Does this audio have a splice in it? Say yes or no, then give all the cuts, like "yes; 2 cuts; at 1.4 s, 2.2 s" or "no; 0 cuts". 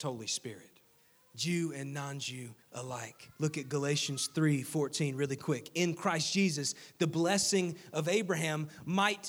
yes; 2 cuts; at 1.0 s, 2.6 s